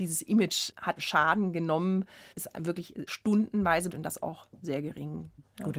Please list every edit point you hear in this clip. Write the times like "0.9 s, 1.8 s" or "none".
1.0 s, 2.3 s, 3.1 s, 3.9 s